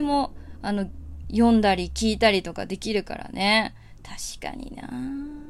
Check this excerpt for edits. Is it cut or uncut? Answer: cut